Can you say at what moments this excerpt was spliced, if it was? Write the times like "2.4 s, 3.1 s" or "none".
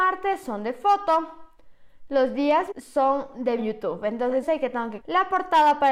2.7 s, 3.6 s, 4.4 s, 5.0 s